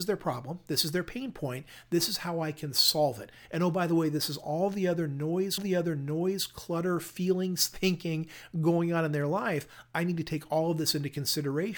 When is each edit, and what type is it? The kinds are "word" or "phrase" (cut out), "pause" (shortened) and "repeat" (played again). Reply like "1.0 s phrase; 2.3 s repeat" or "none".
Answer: 5.6 s repeat